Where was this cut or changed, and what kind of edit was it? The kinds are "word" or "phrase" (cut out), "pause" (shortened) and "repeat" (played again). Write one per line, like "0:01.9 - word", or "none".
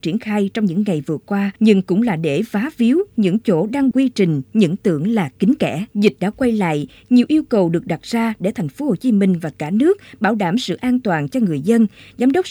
0:01.6 - pause
0:03.9 - phrase
0:05.9 - pause